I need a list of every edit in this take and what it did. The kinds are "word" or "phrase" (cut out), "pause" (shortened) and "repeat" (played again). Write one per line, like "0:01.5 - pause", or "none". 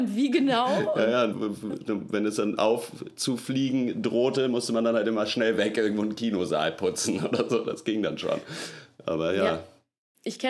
0:01.3 - word